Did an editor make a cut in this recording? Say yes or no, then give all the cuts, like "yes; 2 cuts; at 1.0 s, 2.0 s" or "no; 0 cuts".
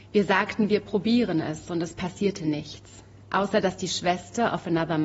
yes; 1 cut; at 3.2 s